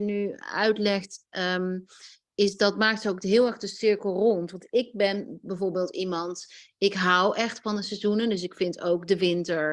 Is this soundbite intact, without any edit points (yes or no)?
yes